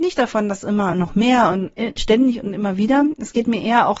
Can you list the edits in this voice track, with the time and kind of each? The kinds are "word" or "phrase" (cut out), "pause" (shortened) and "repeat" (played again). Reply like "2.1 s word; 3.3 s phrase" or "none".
none